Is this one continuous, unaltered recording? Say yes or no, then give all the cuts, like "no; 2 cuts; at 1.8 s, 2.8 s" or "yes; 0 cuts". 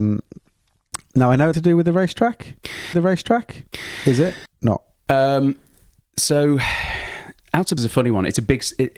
no; 5 cuts; at 1.5 s, 2.9 s, 4.5 s, 6.0 s, 7.8 s